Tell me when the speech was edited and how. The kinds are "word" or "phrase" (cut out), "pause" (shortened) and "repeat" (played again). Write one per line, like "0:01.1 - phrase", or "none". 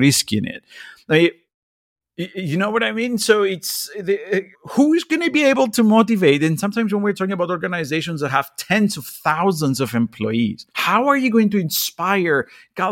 0:04.5 - pause
0:10.7 - pause